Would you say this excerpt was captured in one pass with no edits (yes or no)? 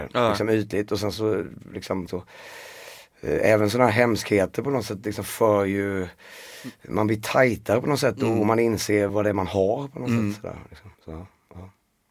no